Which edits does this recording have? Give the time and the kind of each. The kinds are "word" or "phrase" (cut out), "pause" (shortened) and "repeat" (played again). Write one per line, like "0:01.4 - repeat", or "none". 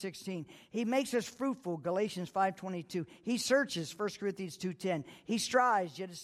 none